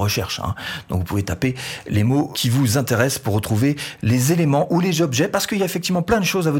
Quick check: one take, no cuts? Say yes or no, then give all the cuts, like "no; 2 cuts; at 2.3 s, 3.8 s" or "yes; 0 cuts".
no; 1 cut; at 2.3 s